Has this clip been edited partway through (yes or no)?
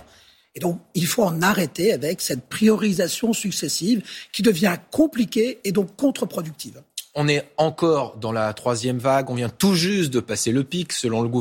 no